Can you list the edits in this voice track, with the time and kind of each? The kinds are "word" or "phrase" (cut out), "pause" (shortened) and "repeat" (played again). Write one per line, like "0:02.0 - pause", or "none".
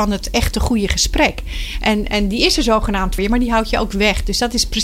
0:03.2 - word